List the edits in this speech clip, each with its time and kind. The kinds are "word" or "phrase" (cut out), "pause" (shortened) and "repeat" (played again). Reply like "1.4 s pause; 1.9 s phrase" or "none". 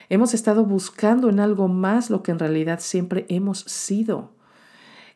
none